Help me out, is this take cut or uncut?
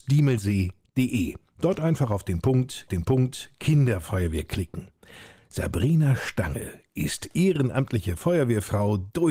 cut